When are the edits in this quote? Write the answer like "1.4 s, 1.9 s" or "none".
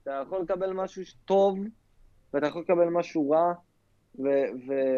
none

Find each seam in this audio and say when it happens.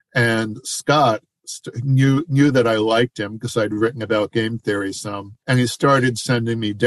5.4 s

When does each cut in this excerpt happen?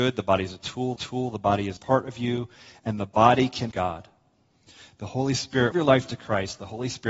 1.0 s, 1.8 s, 3.7 s, 5.7 s

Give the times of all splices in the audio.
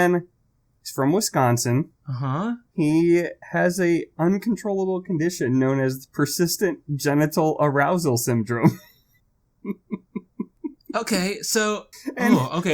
2.0 s

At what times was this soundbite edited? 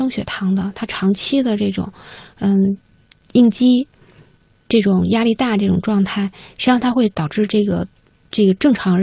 none

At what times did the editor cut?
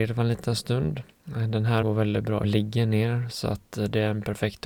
1.1 s, 1.8 s, 2.4 s

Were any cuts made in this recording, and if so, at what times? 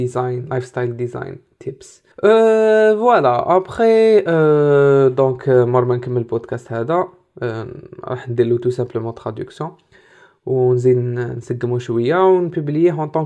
2.1 s

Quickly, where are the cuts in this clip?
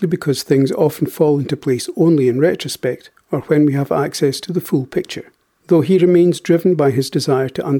none

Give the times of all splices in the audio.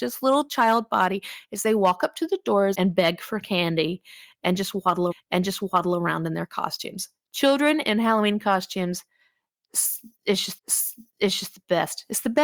2.7 s, 5.1 s, 10.6 s

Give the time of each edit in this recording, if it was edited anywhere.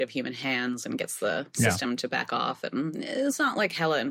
none

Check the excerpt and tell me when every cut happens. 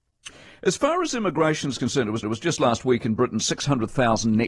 2.2 s

